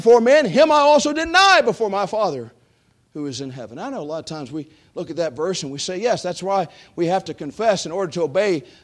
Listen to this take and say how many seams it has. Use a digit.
0